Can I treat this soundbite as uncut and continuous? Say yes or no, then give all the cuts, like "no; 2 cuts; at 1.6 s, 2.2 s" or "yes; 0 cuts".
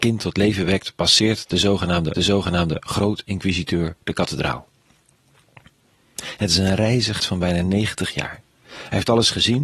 no; 2 cuts; at 2.2 s, 7.2 s